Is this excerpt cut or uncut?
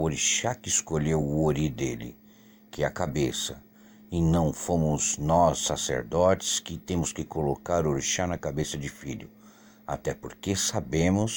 uncut